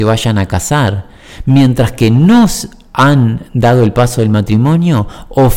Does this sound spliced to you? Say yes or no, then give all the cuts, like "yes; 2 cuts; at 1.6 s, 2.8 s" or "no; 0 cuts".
no; 0 cuts